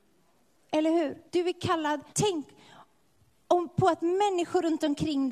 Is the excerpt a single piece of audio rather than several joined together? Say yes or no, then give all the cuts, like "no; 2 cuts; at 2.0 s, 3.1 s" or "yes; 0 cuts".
no; 2 cuts; at 1.3 s, 2.1 s